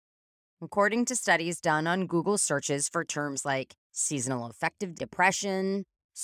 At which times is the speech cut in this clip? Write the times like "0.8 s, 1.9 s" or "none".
3.8 s, 4.9 s